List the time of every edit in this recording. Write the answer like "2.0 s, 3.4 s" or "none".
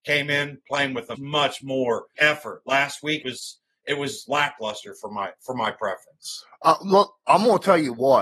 1.2 s, 2.1 s, 3.2 s